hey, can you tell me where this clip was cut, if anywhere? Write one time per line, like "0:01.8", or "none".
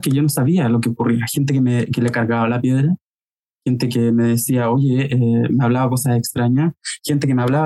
none